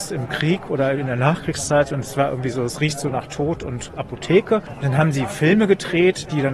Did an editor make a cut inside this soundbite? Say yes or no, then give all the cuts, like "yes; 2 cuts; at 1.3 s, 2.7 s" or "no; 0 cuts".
no; 0 cuts